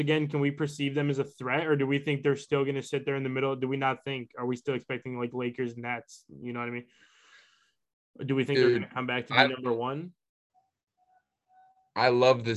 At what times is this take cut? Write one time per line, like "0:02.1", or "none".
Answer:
none